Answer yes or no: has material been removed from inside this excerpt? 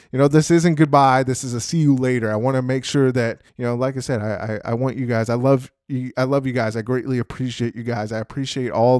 yes